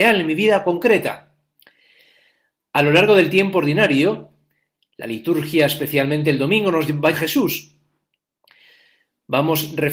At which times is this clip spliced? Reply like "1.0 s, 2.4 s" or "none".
7.1 s